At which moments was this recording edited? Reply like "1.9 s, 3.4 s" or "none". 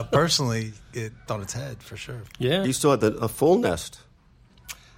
1.3 s, 2.6 s